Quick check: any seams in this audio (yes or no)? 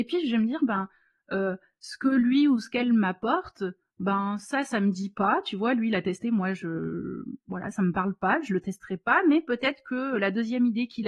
no